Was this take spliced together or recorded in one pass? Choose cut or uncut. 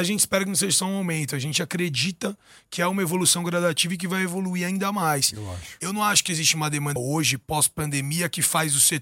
cut